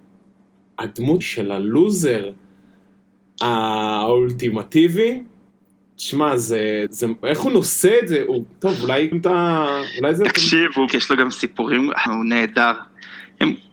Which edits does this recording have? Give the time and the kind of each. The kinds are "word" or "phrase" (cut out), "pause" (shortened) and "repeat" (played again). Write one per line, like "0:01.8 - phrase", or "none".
0:01.2 - word
0:05.5 - pause
0:06.9 - word
0:07.2 - word
0:08.5 - pause
0:09.1 - word
0:10.9 - word
0:12.1 - word